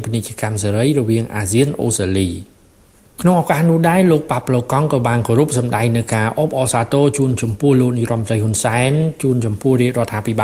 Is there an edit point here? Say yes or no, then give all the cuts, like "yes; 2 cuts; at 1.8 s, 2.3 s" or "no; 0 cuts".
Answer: no; 0 cuts